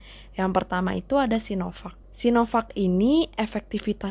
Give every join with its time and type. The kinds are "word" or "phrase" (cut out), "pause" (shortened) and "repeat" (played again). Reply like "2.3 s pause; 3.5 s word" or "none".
2.0 s pause